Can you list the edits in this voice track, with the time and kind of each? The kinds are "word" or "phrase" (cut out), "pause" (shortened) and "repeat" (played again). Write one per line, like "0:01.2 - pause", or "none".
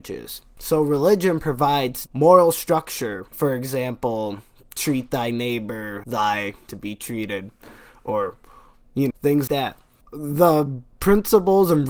0:02.1 - word
0:03.3 - word
0:06.0 - word
0:06.7 - word
0:09.1 - word
0:09.5 - word